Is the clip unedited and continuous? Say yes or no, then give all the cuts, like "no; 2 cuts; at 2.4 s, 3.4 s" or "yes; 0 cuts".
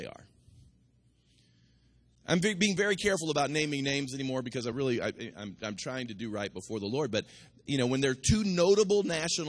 yes; 0 cuts